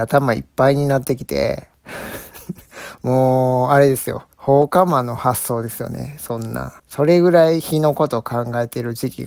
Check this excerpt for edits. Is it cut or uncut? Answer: cut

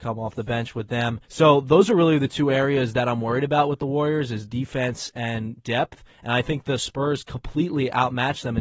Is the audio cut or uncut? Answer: cut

